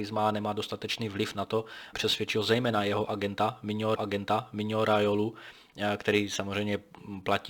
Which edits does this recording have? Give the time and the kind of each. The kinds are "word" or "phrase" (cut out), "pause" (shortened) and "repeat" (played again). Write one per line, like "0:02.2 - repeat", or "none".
0:01.9 - word
0:04.0 - repeat